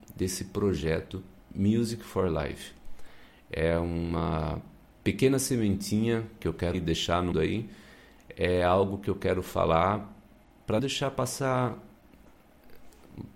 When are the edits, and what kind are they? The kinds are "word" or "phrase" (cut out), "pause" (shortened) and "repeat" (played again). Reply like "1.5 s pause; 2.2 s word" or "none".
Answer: 6.7 s word; 7.3 s word; 10.8 s word